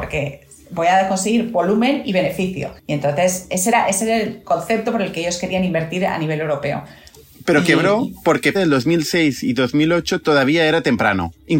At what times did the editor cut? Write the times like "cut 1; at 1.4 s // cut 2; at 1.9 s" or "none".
cut 1; at 2.8 s // cut 2; at 8.5 s